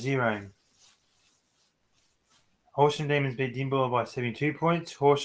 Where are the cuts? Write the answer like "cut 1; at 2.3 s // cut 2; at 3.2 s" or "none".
none